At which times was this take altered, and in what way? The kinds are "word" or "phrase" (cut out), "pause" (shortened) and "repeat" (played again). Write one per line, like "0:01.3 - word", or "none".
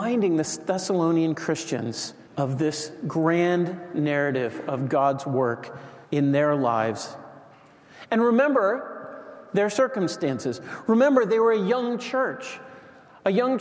0:02.3 - pause
0:06.0 - pause